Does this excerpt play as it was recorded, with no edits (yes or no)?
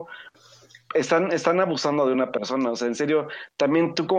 yes